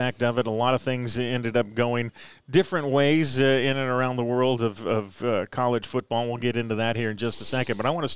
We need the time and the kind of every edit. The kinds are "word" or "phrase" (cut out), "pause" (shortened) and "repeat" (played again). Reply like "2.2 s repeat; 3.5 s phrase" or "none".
none